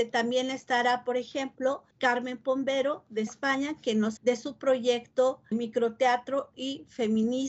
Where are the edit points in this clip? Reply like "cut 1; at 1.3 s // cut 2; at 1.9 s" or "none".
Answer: cut 1; at 1.9 s // cut 2; at 3.3 s // cut 3; at 4.2 s // cut 4; at 5.5 s